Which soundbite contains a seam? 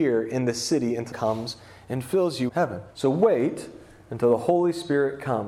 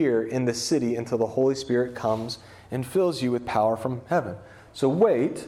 first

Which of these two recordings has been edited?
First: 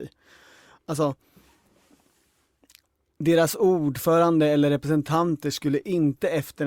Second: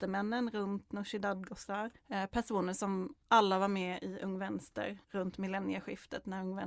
second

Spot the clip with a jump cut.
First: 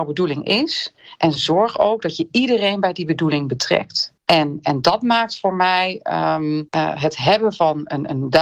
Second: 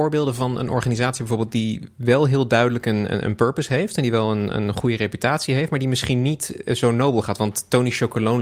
first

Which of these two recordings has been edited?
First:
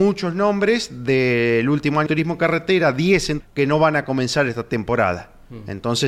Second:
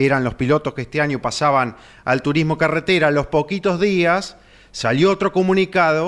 first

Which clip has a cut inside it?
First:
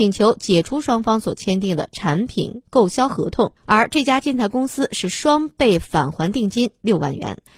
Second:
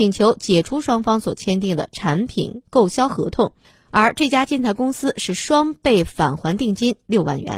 first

